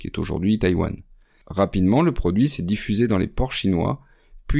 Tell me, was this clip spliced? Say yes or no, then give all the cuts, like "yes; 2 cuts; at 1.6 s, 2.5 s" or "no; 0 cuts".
no; 0 cuts